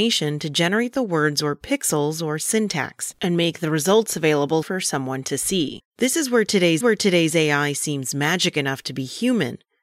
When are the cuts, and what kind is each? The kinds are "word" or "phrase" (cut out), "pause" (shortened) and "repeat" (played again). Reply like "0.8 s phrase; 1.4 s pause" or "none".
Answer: 4.6 s word; 6.8 s repeat